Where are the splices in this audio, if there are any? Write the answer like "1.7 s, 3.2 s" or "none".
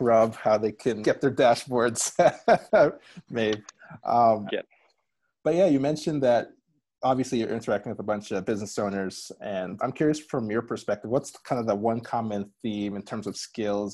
1.0 s, 4.5 s, 9.8 s